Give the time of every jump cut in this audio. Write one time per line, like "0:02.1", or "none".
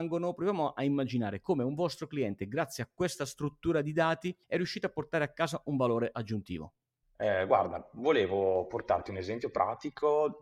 0:04.4
0:07.0